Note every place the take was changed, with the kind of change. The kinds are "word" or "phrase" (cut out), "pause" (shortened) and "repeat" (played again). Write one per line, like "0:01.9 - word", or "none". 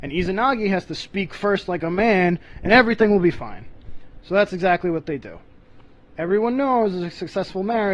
none